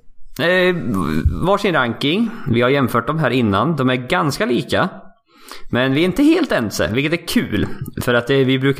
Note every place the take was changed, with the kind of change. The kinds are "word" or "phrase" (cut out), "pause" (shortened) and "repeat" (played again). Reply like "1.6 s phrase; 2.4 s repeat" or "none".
none